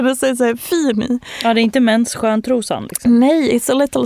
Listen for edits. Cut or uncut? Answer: uncut